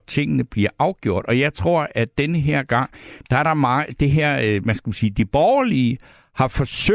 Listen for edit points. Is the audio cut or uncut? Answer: uncut